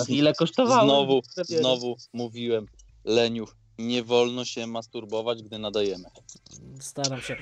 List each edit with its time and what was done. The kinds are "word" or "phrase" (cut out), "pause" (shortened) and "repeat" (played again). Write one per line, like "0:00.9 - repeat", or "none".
none